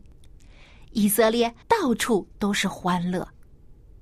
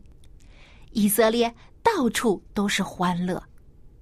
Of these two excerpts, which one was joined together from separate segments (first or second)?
first